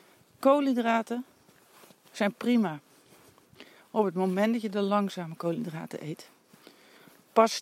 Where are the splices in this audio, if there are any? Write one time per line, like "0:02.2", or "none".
none